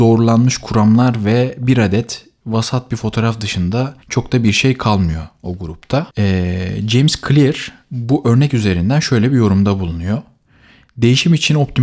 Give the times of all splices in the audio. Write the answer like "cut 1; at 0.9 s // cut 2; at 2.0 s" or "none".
cut 1; at 4.0 s // cut 2; at 6.1 s